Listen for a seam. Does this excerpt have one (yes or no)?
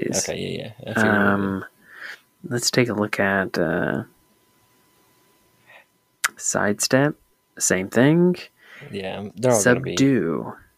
no